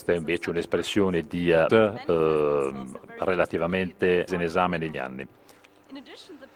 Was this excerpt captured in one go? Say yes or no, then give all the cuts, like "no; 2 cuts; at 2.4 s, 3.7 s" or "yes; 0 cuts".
no; 3 cuts; at 1.7 s, 4.3 s, 4.9 s